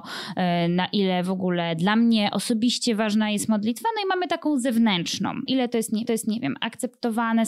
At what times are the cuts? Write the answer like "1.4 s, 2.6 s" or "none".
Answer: 5.5 s, 6.1 s

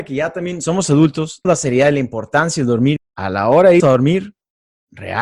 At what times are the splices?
1.4 s, 3.0 s, 3.8 s

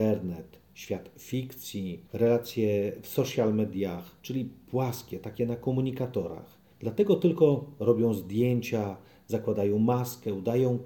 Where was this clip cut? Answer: 4.2 s

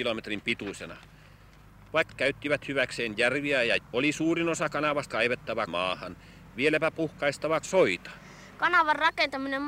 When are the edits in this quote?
2.1 s, 3.8 s, 5.1 s, 5.7 s, 7.6 s

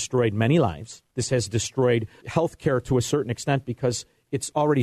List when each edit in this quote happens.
1.1 s, 2.2 s

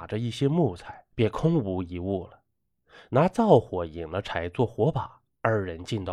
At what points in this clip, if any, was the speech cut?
none

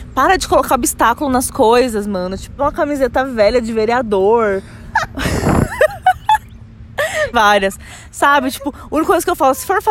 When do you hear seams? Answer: 2.6 s, 7.3 s

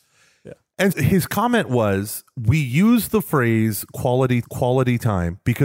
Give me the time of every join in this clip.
0.9 s, 4.4 s

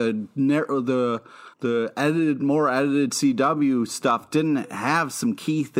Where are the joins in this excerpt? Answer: 1.5 s

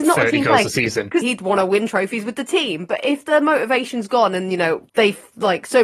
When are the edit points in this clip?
1.2 s, 4.9 s

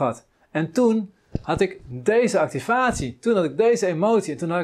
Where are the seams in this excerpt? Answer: none

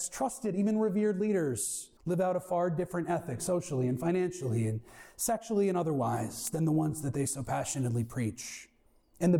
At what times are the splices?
2.0 s

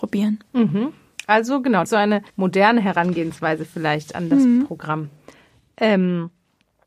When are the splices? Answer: 1.9 s, 2.3 s

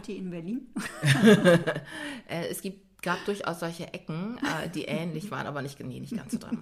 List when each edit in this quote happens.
none

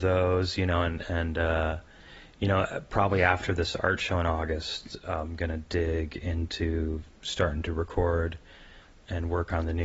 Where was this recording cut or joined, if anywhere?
none

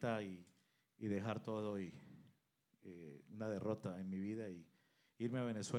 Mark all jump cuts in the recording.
none

